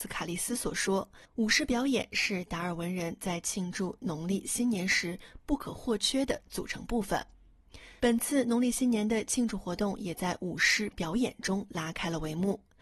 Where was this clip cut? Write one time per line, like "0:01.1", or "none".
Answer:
0:01.2